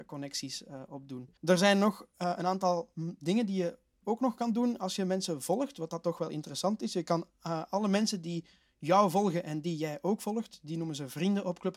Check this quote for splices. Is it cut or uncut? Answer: cut